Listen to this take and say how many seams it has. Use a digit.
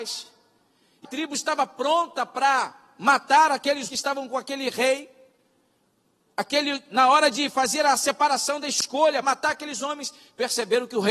3